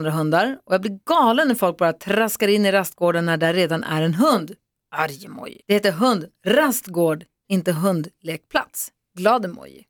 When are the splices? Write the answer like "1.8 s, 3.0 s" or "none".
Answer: 5.6 s